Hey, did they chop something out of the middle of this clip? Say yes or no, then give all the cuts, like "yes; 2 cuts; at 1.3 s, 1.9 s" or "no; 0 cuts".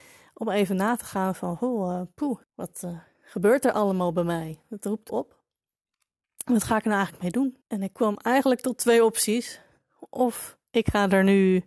yes; 3 cuts; at 2.4 s, 5.1 s, 7.6 s